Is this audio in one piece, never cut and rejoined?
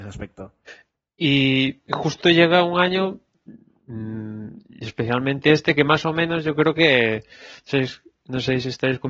yes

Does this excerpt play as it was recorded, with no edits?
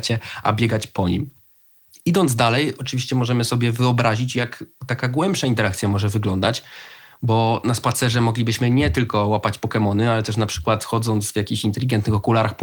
yes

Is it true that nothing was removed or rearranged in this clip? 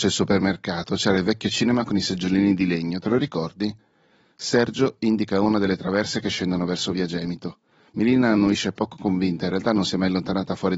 yes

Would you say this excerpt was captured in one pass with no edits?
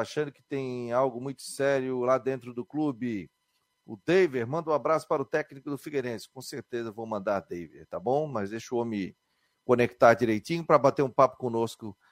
yes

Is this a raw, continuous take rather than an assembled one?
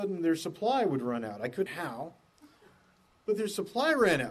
no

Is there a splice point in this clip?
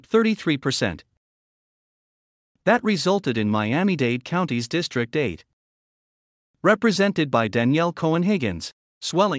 no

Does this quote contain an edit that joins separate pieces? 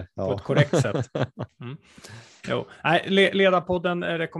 no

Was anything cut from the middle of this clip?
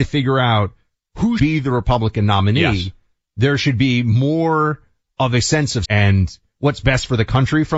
yes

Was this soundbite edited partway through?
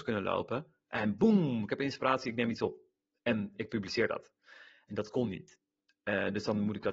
no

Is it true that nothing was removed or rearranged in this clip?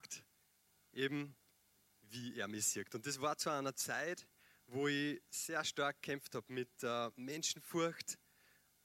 yes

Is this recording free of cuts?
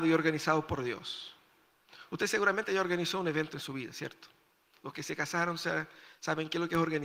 yes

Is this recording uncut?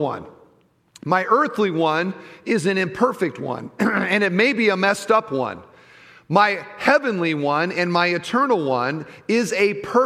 yes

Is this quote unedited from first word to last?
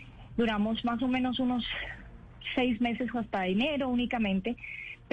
no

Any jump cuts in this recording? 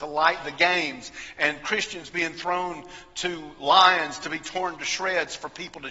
no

